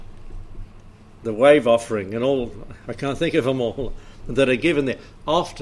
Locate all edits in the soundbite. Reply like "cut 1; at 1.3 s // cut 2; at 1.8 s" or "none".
none